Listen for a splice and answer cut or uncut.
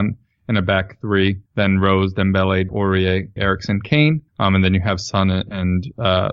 cut